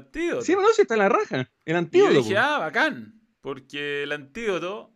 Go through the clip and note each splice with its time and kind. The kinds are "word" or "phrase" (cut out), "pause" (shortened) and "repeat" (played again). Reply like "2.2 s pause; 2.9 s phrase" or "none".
3.3 s pause